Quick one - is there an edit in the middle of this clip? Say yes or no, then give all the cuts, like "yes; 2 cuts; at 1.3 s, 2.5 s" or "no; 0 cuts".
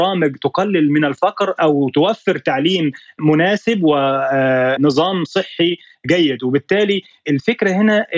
no; 0 cuts